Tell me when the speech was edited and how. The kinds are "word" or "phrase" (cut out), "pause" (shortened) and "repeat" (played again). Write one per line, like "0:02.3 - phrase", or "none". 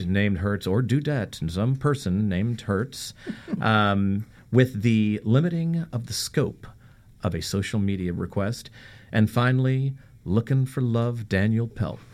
none